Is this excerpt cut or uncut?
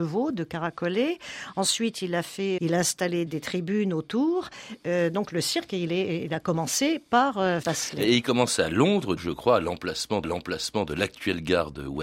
cut